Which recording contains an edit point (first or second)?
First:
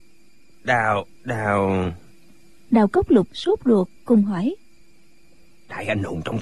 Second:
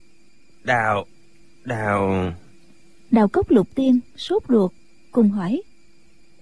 first